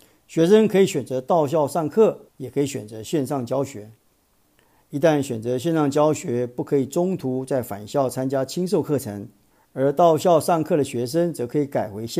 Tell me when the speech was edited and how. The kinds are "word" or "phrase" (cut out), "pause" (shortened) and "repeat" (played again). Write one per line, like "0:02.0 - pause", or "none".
0:02.3 - pause
0:09.5 - pause